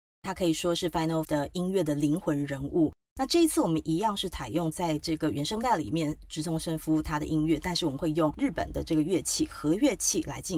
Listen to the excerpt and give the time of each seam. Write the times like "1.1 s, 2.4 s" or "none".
1.2 s